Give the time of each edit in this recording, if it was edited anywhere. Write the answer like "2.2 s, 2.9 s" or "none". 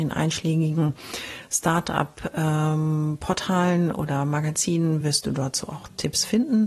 none